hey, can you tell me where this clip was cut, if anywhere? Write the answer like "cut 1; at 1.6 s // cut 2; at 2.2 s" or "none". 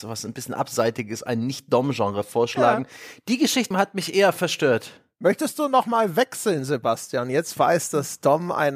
cut 1; at 3.7 s // cut 2; at 7.6 s